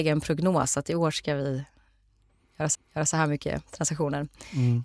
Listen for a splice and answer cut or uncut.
cut